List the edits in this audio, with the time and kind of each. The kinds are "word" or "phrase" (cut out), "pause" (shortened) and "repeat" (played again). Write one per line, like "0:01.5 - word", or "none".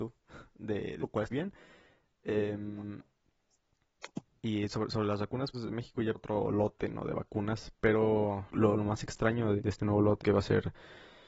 0:01.0 - word
0:01.3 - word
0:04.4 - word
0:05.5 - word
0:06.1 - word
0:08.5 - word
0:09.6 - word
0:10.2 - word